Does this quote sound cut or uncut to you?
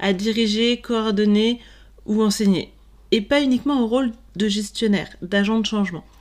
uncut